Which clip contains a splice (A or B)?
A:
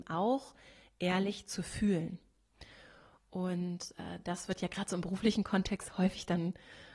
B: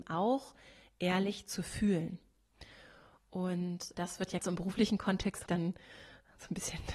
B